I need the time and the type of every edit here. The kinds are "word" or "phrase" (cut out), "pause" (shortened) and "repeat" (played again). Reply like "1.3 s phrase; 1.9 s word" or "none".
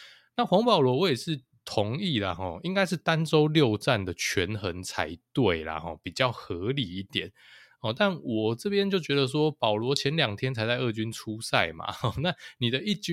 none